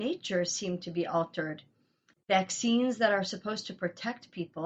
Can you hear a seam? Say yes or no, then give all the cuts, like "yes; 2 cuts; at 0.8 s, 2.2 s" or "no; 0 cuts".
no; 0 cuts